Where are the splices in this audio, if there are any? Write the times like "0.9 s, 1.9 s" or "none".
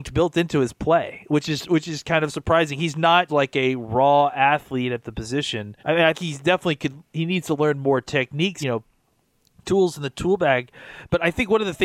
3.3 s, 5.8 s, 6.1 s, 8.6 s